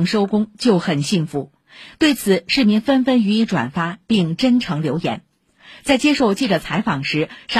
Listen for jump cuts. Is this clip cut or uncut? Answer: uncut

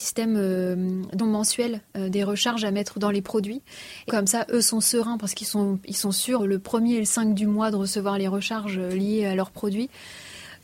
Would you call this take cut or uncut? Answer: cut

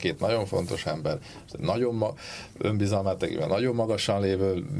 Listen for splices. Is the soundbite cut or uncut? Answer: uncut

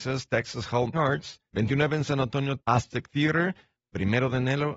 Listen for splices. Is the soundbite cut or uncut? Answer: cut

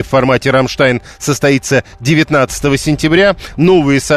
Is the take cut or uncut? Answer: uncut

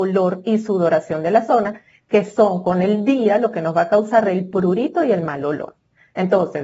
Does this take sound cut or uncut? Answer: uncut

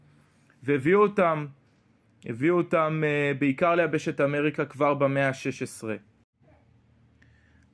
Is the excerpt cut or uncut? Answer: uncut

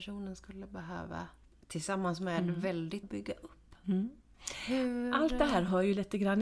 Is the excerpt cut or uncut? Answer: cut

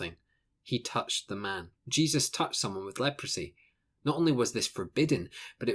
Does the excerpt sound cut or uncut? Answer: cut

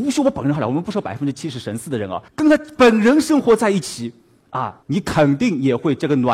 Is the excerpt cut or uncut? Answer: cut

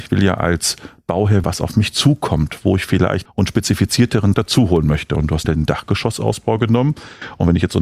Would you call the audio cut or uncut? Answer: cut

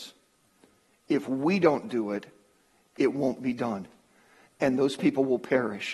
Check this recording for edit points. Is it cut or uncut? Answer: uncut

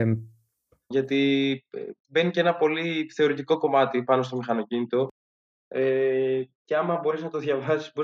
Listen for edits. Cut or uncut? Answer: uncut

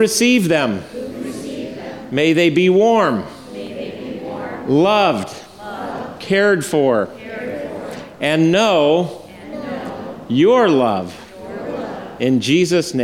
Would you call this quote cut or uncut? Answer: uncut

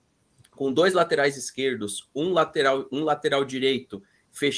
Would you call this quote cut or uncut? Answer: uncut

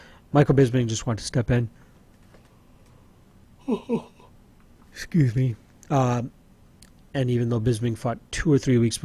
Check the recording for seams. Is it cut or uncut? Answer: uncut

